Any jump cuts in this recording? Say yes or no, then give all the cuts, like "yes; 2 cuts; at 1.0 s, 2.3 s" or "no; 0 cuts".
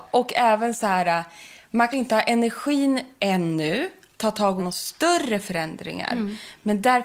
yes; 3 cuts; at 1.9 s, 4.1 s, 4.6 s